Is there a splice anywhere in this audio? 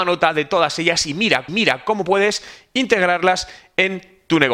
yes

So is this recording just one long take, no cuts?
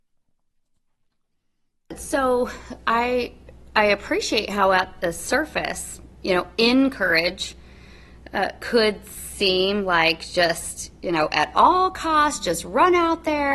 yes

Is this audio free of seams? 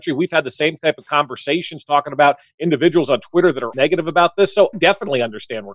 no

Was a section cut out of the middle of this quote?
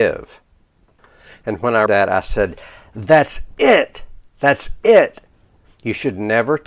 yes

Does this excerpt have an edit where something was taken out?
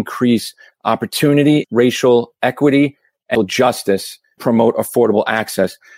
yes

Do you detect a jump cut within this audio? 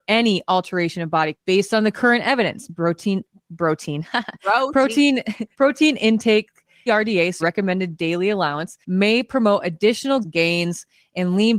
yes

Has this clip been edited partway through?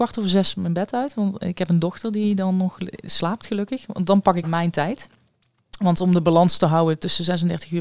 yes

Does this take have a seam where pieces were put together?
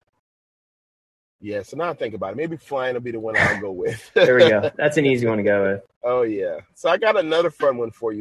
yes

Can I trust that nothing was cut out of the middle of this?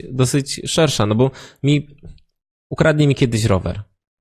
yes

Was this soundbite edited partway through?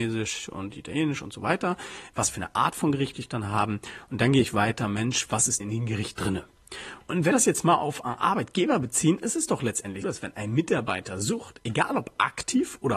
yes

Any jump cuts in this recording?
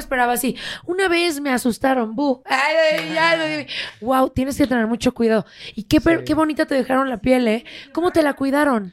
no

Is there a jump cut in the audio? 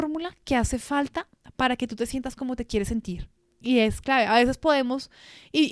yes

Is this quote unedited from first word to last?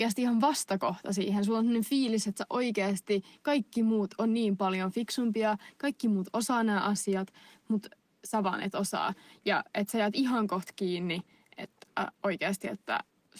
yes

